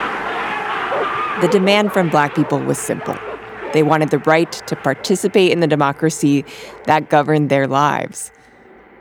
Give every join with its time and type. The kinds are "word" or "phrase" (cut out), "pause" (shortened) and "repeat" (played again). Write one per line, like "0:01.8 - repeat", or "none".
none